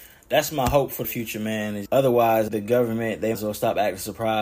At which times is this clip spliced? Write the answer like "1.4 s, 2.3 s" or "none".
1.0 s, 1.9 s, 2.5 s, 3.3 s

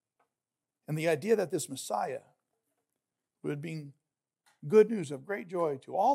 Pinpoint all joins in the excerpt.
none

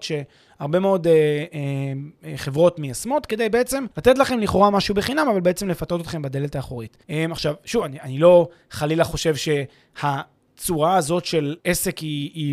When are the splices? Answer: 3.9 s, 7.0 s, 11.6 s

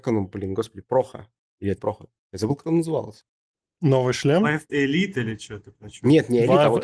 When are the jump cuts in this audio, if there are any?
1.8 s, 4.7 s

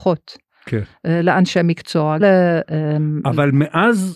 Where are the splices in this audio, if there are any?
2.2 s

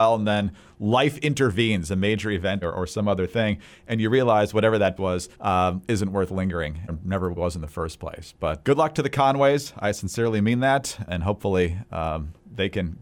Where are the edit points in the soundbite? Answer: 2.6 s, 5.0 s, 5.3 s, 6.9 s, 7.4 s, 8.6 s

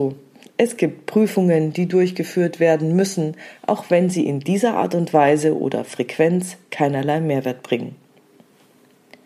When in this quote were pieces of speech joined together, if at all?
none

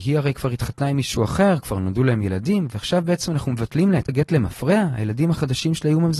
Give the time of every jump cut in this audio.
4.1 s

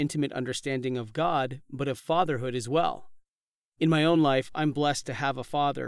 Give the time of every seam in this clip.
none

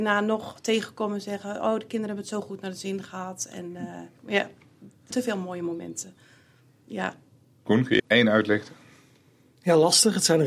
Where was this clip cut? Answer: 4.2 s, 5.1 s, 8.0 s

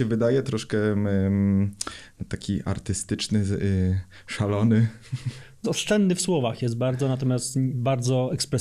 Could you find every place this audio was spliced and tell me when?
5.6 s

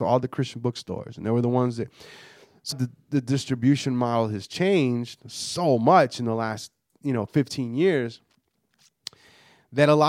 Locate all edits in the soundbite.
2.7 s

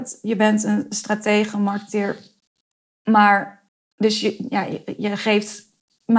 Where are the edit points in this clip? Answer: none

